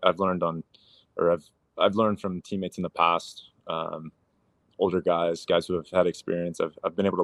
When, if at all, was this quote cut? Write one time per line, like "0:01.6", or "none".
none